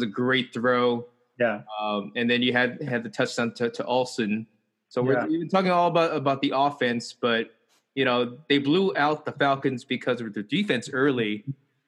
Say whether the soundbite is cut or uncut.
uncut